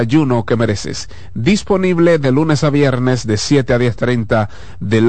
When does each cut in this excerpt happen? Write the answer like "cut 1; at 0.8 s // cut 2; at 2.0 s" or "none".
none